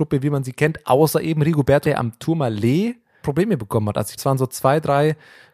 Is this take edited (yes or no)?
yes